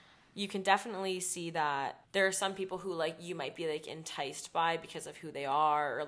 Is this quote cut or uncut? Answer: cut